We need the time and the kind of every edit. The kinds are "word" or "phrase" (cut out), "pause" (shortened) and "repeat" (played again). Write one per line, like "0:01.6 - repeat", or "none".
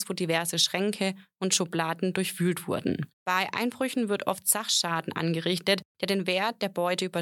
0:03.1 - pause
0:05.9 - pause